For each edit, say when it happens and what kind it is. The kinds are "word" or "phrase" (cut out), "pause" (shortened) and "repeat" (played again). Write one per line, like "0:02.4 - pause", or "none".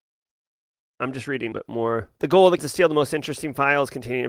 0:01.5 - phrase
0:02.1 - pause
0:02.6 - word